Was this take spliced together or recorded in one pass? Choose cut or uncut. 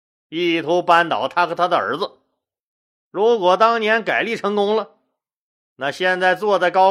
uncut